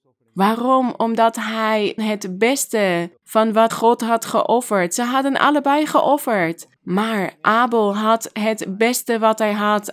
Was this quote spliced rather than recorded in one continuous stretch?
yes; 4 cuts; at 2.0 s, 3.2 s, 3.7 s, 6.8 s

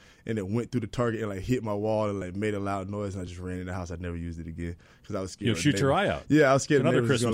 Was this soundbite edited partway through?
no; 0 cuts

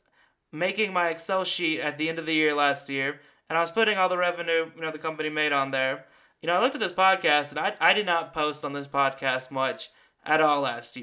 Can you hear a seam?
no; 0 cuts

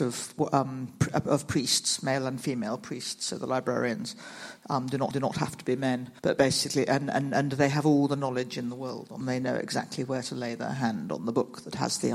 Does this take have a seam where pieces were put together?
yes; 3 cuts; at 5.1 s, 6.2 s, 9.2 s

